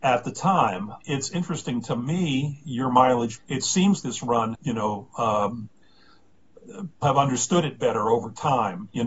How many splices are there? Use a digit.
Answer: 5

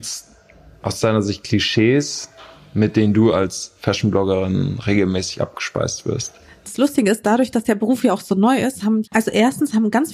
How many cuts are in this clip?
1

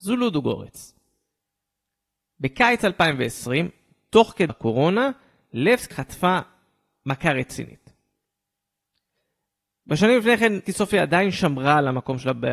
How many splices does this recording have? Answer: 3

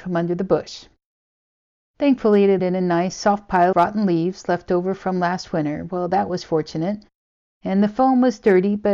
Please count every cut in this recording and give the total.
2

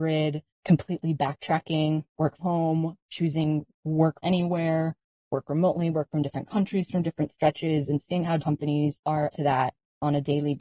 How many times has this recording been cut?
4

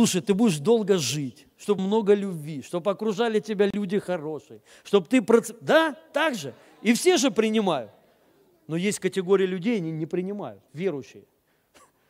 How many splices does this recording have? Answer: 2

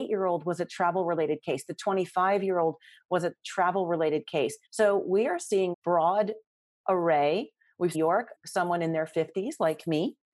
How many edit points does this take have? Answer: 3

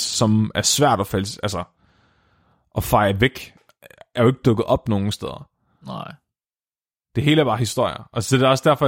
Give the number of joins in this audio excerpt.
0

